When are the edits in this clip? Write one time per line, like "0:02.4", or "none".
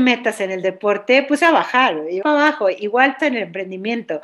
0:01.4
0:02.2
0:03.2